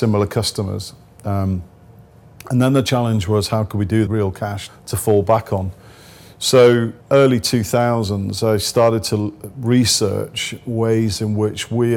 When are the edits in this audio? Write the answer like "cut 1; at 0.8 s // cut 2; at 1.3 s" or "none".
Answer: cut 1; at 4.1 s // cut 2; at 4.7 s // cut 3; at 7.0 s